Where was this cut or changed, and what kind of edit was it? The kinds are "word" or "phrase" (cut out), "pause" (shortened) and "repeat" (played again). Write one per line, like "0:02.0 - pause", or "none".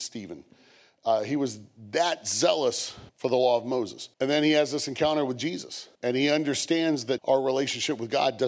0:03.1 - pause
0:04.1 - pause
0:06.0 - pause
0:07.2 - word